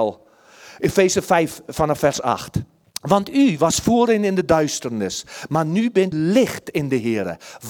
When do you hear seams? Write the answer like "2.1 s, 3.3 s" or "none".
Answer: 2.8 s, 6.1 s